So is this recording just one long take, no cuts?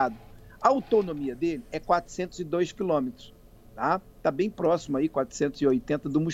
yes; 0 cuts

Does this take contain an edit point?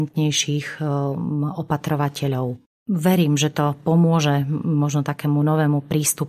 no; 0 cuts

